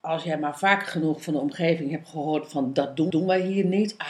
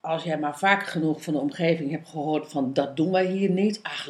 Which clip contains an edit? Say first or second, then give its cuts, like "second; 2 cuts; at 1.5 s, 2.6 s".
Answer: first; 1 cut; at 3.1 s